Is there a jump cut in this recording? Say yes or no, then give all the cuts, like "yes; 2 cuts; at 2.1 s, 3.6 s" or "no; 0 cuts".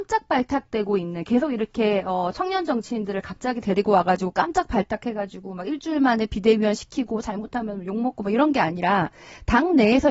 no; 0 cuts